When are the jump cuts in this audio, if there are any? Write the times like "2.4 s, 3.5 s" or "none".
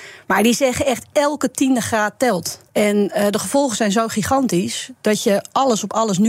2.7 s